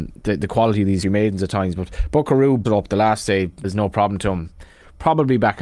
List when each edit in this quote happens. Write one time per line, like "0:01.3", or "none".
0:01.0
0:02.6
0:03.6